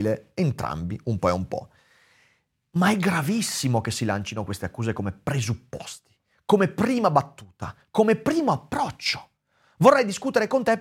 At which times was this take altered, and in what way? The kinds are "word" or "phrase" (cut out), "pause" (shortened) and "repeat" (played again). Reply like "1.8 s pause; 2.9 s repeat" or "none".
none